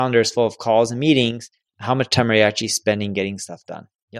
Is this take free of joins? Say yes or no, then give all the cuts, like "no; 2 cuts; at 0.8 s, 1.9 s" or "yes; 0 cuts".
yes; 0 cuts